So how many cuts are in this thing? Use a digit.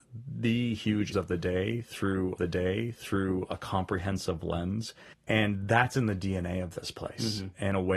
3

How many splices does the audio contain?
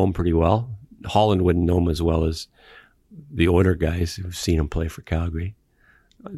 0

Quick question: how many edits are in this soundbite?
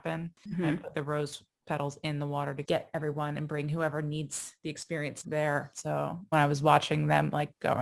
4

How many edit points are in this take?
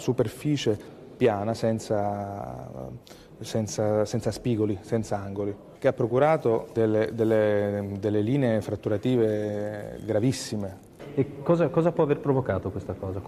0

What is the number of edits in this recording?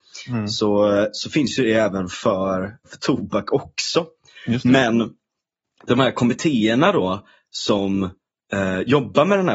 1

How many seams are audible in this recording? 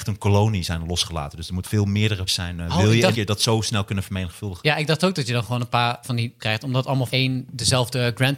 6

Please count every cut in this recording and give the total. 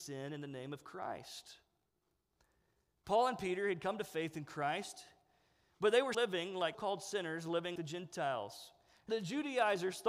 4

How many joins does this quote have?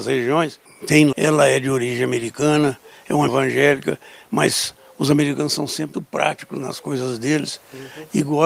3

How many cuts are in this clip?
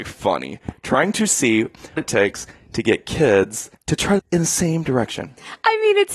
3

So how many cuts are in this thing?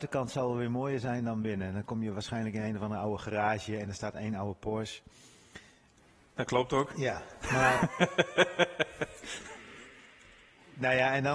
0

